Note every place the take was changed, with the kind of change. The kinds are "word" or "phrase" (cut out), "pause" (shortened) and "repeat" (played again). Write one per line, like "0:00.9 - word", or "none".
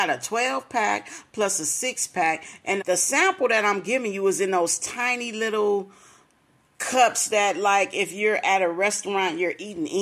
0:02.8 - word